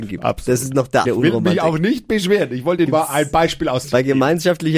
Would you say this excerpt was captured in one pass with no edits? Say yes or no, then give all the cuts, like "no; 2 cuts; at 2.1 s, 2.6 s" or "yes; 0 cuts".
no; 3 cuts; at 1.0 s, 2.9 s, 3.8 s